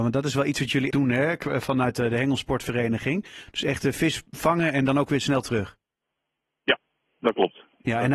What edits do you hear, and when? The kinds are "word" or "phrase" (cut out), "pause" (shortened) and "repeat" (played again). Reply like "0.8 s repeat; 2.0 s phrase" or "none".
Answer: 0.9 s word